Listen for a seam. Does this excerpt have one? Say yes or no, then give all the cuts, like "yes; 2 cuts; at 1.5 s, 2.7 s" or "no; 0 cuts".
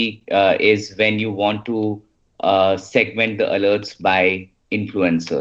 no; 0 cuts